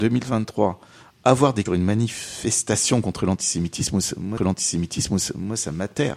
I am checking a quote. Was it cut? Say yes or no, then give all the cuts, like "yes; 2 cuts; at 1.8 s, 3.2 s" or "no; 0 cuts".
yes; 2 cuts; at 1.7 s, 4.4 s